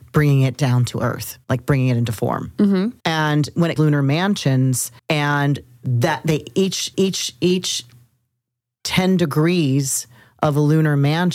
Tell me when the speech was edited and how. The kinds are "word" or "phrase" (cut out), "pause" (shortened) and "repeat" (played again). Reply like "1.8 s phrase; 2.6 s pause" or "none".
1.4 s pause; 3.0 s pause; 3.8 s phrase; 5.0 s pause; 6.9 s repeat